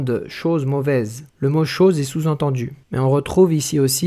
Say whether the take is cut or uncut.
cut